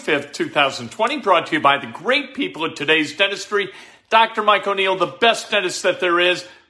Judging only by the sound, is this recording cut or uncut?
uncut